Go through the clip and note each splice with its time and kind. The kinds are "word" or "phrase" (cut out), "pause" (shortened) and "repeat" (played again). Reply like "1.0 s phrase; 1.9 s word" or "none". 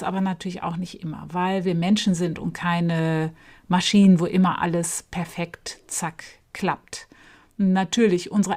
none